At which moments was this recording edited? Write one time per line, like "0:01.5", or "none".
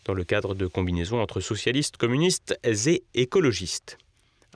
none